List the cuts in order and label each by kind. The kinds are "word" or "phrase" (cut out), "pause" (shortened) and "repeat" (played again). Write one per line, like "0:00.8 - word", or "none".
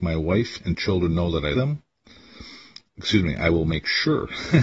0:01.5 - word
0:02.9 - pause